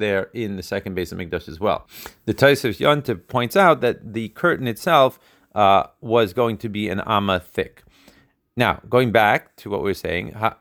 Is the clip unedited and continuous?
yes; 0 cuts

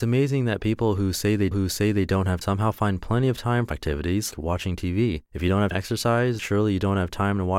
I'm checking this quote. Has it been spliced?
yes; 7 cuts; at 1.5 s, 2.4 s, 3.7 s, 4.3 s, 5.3 s, 5.7 s, 6.4 s

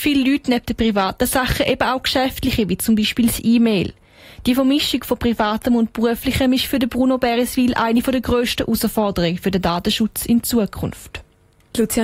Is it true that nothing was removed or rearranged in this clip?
yes; 0 cuts

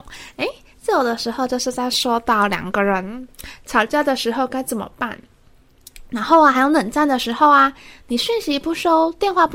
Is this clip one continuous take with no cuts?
yes; 0 cuts

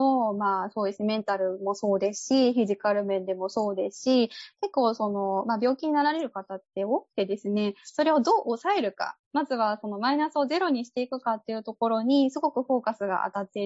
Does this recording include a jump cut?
no; 0 cuts

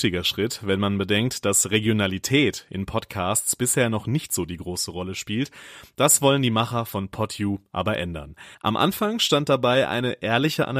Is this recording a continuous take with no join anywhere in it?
no; 1 cut; at 8.5 s

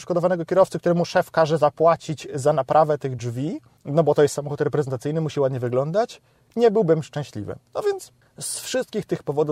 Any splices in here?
no; 0 cuts

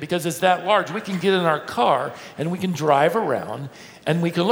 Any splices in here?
no; 0 cuts

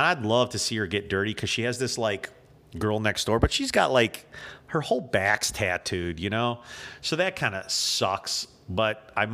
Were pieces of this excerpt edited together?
no; 0 cuts

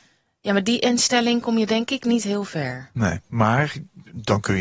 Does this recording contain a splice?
no; 0 cuts

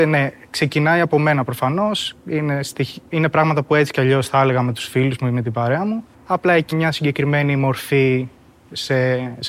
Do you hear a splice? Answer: yes; 2 cuts; at 6.1 s, 6.7 s

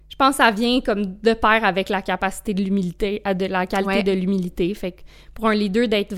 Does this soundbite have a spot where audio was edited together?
no; 0 cuts

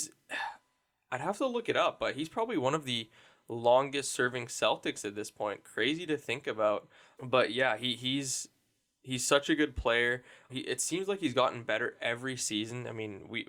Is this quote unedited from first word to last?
yes; 0 cuts

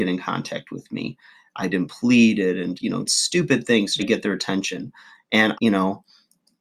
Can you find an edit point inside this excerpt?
yes; 5 cuts; at 1.7 s, 2.8 s, 3.1 s, 4.0 s, 5.5 s

